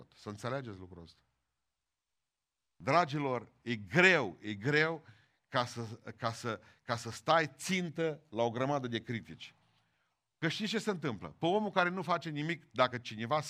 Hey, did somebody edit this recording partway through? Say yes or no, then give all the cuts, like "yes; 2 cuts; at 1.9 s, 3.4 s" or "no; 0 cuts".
no; 0 cuts